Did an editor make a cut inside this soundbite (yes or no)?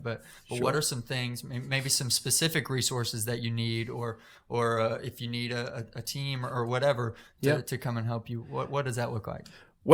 no